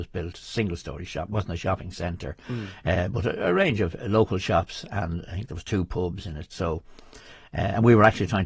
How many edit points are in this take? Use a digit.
1